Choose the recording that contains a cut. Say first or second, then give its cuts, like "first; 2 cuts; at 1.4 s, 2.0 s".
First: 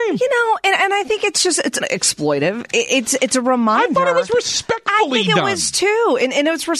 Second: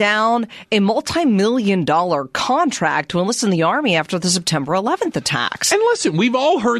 first; 1 cut; at 1.8 s